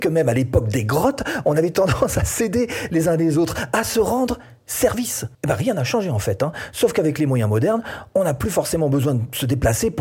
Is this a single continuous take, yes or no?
no